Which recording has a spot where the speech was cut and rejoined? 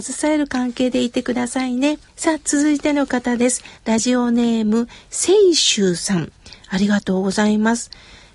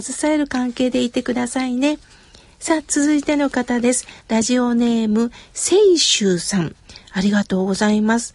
first; 1 cut; at 2.1 s

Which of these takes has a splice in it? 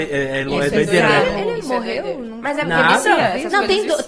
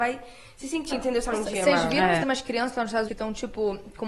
second; 4 cuts; at 0.9 s, 1.3 s, 2.2 s, 3.1 s

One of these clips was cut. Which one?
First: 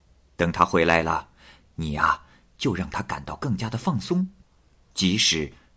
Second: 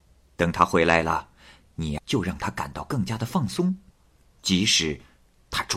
second; 1 cut; at 2.0 s

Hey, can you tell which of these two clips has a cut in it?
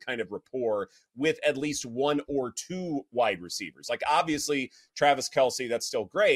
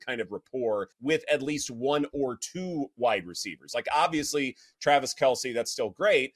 second; 1 cut; at 0.9 s

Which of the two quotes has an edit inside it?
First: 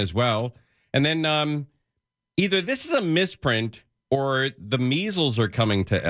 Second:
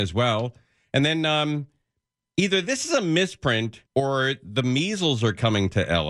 second; 1 cut; at 3.9 s

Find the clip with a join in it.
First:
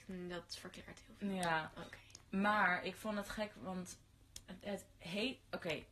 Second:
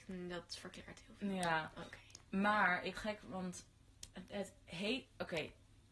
second; 1 cut; at 2.9 s

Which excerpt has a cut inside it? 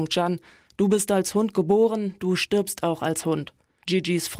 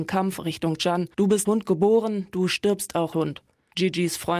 second; 3 cuts; at 1.1 s, 1.4 s, 3.1 s

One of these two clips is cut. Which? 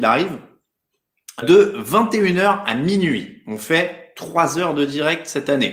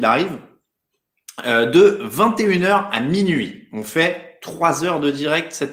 first; 1 cut; at 1.4 s

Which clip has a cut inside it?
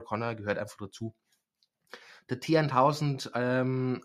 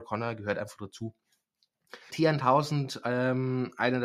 second; 1 cut; at 2.1 s

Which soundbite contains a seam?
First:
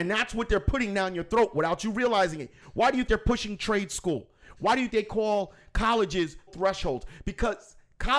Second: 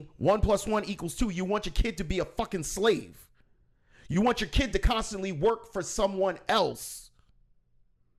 first; 3 cuts; at 3.1 s, 4.9 s, 6.5 s

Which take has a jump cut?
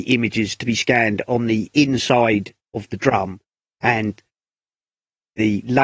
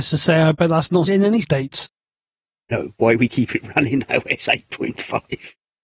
second; 4 cuts; at 1.1 s, 1.4 s, 3.0 s, 4.1 s

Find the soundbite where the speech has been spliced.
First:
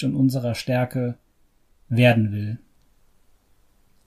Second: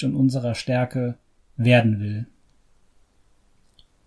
second; 1 cut; at 1.2 s

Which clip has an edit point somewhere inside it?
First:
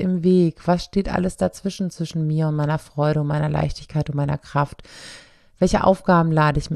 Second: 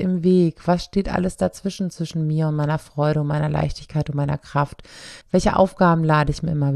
second; 1 cut; at 5.2 s

